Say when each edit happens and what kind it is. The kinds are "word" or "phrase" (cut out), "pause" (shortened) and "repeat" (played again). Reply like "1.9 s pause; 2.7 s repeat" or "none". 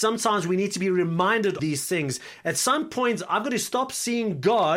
1.6 s word

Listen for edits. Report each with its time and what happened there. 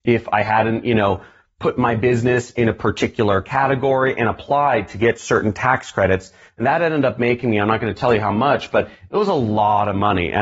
none

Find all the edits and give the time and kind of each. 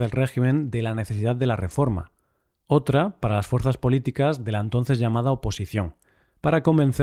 none

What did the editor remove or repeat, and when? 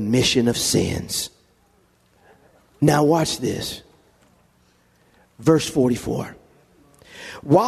none

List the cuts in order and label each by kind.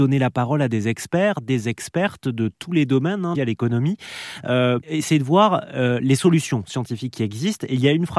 3.3 s phrase; 4.8 s word

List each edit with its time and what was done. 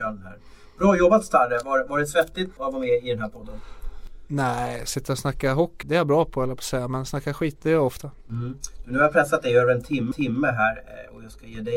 2.6 s word; 5.8 s word; 7.6 s word; 10.1 s repeat

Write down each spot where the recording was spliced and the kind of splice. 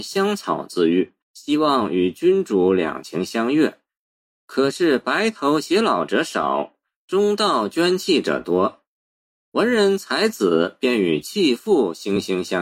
1.2 s pause

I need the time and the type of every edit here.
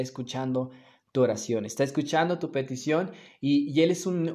none

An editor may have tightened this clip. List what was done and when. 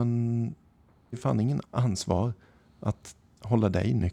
1.1 s word; 1.6 s word

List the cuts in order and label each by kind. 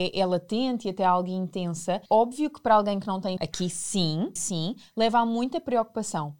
2.1 s pause; 3.4 s word; 4.4 s word

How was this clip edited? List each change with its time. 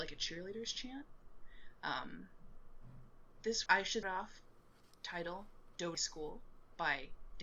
3.7 s word; 4.0 s word; 5.9 s word

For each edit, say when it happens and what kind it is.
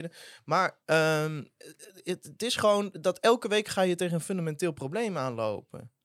none

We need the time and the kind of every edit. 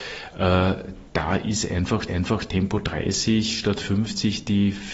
1.1 s pause; 2.1 s repeat

